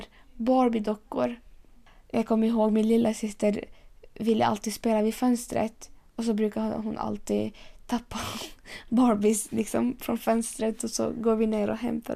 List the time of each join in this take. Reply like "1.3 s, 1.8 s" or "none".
none